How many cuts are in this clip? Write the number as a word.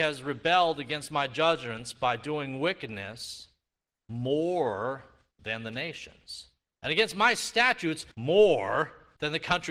one